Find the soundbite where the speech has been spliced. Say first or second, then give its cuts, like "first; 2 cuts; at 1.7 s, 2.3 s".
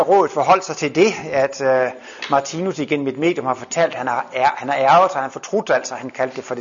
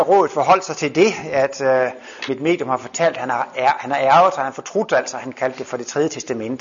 second; 1 cut; at 2.3 s